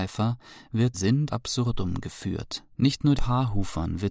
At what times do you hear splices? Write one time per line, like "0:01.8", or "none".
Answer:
0:00.9
0:01.3
0:02.7
0:03.2